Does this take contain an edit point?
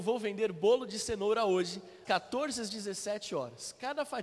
yes; 1 cut; at 2.0 s

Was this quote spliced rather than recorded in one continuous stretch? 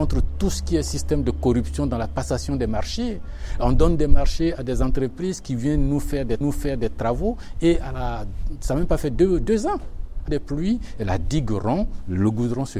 yes; 2 cuts; at 6.4 s, 10.3 s

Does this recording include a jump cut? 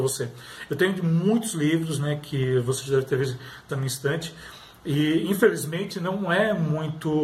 yes; 1 cut; at 3.7 s

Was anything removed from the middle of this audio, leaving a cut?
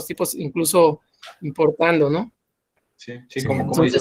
no; 0 cuts

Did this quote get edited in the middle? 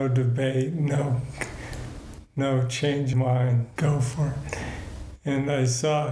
yes; 2 cuts; at 3.1 s, 3.8 s

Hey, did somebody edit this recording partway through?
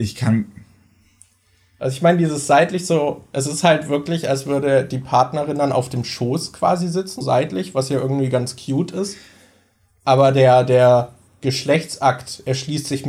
yes; 1 cut; at 7.2 s

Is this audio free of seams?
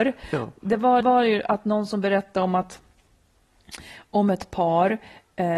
no; 1 cut; at 1.0 s

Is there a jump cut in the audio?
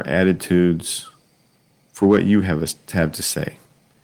yes; 1 cut; at 1.6 s

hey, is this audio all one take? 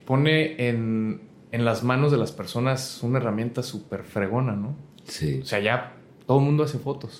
yes; 0 cuts

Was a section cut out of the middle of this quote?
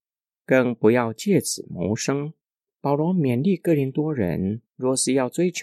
yes; 2 cuts; at 2.5 s, 4.7 s

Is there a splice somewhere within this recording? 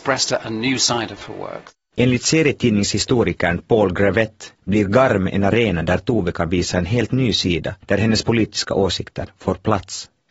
yes; 2 cuts; at 4.6 s, 7.8 s

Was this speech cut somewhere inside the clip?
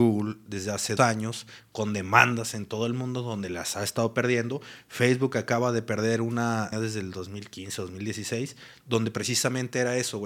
yes; 2 cuts; at 1.0 s, 6.7 s

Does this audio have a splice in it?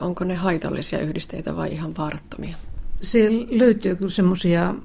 no; 0 cuts

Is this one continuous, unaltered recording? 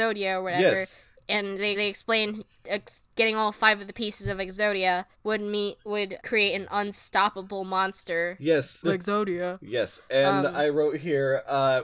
no; 5 cuts; at 1.7 s, 3.1 s, 5.1 s, 6.2 s, 8.8 s

